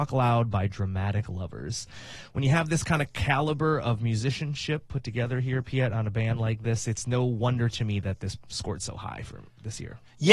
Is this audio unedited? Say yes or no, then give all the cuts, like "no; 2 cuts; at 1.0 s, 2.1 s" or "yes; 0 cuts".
yes; 0 cuts